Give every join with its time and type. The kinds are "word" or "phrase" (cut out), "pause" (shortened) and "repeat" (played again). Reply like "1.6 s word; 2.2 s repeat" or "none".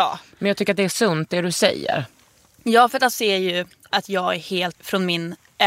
3.1 s word; 4.7 s word